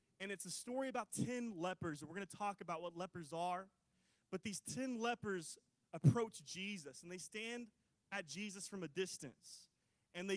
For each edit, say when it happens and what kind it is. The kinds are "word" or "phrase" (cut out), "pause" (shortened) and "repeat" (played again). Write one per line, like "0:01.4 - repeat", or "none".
0:01.1 - word